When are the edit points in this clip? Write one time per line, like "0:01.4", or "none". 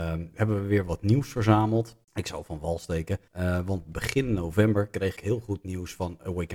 0:02.0
0:03.3
0:05.2

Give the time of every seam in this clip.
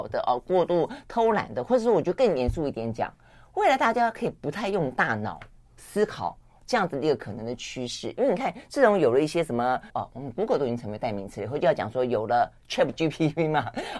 0:09.9

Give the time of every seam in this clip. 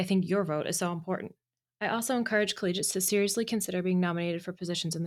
0:01.6

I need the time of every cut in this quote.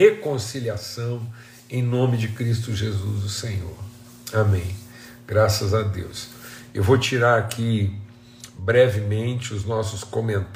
none

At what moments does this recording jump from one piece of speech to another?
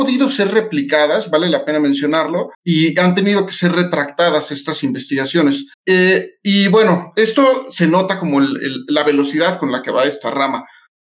0:02.5
0:05.7

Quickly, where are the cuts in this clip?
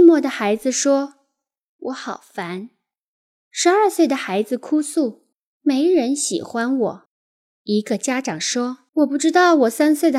0:05.3
0:07.1
0:08.9

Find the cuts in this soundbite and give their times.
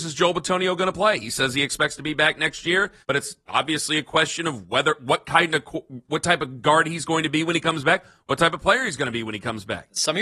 0:03.0

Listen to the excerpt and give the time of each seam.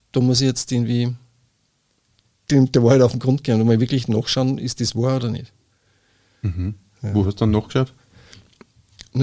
none

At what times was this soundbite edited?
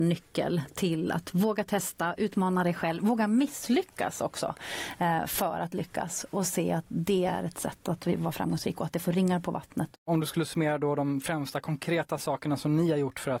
none

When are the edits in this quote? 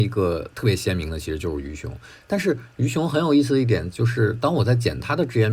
none

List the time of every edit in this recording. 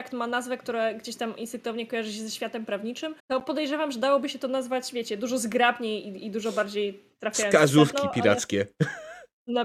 0:03.2

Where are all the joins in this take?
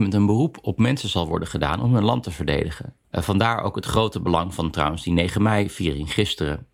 0:03.0

